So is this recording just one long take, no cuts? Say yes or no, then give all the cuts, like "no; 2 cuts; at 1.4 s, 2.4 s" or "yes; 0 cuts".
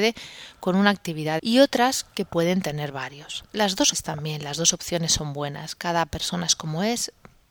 no; 3 cuts; at 1.4 s, 3.5 s, 3.9 s